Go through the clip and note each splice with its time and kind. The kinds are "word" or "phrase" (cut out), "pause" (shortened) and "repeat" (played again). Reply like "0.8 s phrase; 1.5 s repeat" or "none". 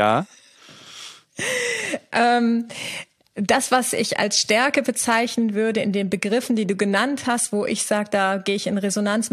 none